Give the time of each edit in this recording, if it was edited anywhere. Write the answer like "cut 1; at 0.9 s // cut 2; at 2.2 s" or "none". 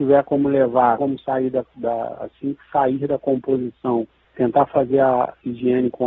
cut 1; at 1.0 s // cut 2; at 4.2 s